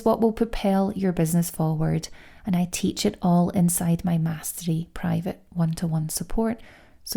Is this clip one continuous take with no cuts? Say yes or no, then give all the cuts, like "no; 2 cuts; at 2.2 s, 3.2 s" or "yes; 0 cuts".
yes; 0 cuts